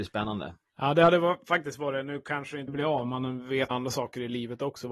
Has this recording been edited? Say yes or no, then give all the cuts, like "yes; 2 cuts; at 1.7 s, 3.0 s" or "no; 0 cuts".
yes; 2 cuts; at 2.7 s, 3.7 s